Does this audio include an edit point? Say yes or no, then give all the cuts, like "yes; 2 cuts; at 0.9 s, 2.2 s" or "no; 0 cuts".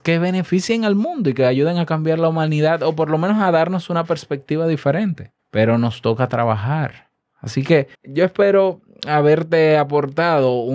yes; 2 cuts; at 5.4 s, 7.9 s